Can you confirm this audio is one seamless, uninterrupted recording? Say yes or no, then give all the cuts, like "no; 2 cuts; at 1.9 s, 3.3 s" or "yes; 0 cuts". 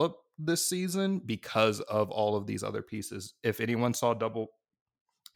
yes; 0 cuts